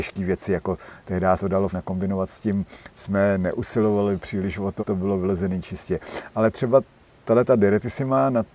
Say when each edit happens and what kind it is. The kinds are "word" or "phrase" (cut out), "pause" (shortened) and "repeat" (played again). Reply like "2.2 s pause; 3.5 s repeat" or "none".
1.4 s word; 1.7 s word; 3.0 s phrase; 4.8 s word